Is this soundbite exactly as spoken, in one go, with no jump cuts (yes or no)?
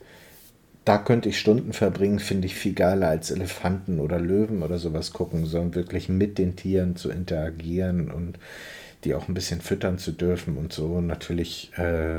no